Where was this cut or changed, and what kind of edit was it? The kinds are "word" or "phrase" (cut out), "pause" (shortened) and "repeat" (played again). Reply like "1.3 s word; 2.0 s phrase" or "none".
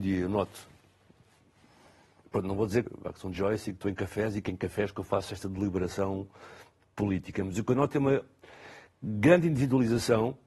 2.8 s word; 3.3 s word